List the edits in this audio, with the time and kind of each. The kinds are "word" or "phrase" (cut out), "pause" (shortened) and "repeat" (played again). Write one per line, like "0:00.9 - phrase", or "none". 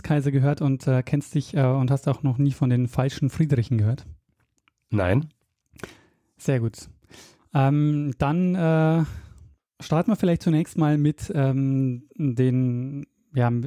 none